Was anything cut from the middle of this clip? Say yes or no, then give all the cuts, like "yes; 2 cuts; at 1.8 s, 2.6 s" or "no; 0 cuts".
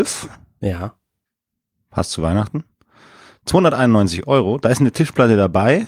no; 0 cuts